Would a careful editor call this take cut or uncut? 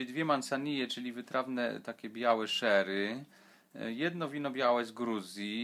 uncut